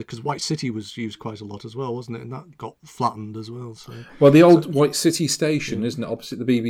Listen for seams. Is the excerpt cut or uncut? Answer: uncut